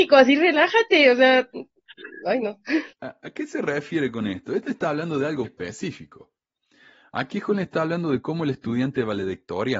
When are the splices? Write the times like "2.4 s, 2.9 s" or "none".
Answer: 2.9 s, 5.4 s